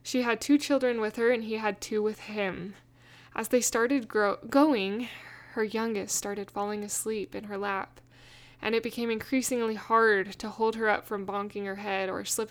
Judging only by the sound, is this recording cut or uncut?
uncut